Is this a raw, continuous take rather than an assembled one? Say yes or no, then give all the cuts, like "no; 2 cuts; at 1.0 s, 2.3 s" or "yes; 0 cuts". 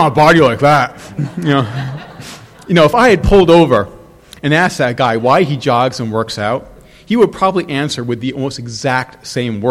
yes; 0 cuts